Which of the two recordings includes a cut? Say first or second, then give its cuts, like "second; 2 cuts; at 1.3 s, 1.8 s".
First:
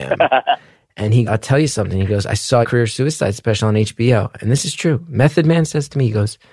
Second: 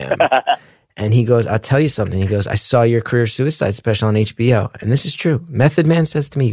first; 2 cuts; at 1.3 s, 2.6 s